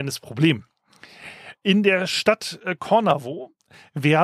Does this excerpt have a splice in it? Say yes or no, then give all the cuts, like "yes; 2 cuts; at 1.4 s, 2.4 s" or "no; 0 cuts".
no; 0 cuts